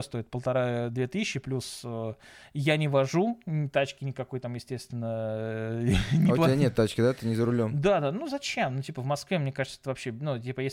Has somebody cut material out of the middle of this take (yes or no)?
no